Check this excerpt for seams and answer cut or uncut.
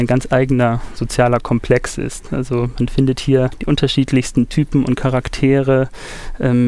uncut